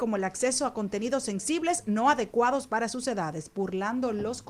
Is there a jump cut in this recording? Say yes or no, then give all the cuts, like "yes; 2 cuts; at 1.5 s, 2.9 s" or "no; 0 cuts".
no; 0 cuts